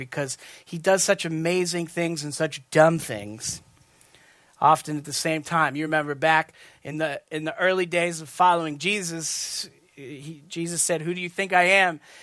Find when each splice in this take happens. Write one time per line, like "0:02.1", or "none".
none